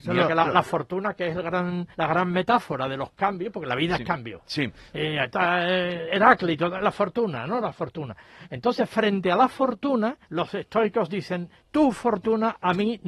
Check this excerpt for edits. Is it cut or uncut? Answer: cut